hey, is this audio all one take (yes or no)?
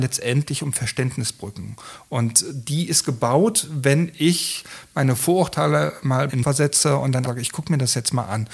no